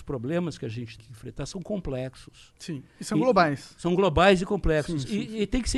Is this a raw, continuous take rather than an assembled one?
no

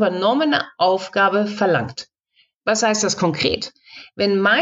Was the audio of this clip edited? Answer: no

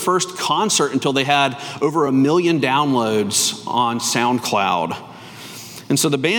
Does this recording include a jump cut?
no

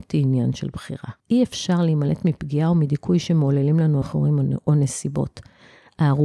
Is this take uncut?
no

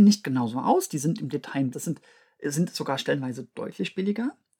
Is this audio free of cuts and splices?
no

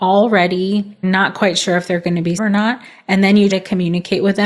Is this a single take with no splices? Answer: no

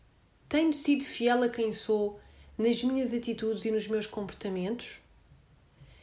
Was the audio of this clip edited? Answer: no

